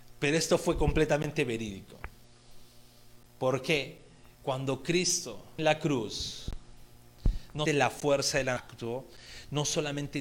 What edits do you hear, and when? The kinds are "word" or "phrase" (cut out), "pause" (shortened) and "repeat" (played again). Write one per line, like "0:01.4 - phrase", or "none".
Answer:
0:03.3 - pause
0:05.6 - phrase
0:07.7 - word
0:08.6 - word